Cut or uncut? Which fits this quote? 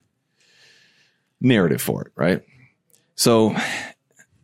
uncut